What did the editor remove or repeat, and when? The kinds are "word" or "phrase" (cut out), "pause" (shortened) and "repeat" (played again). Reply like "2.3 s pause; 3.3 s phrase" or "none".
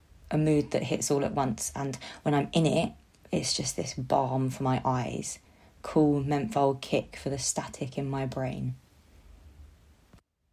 none